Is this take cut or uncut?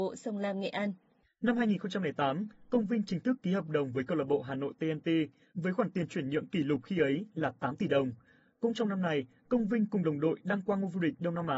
uncut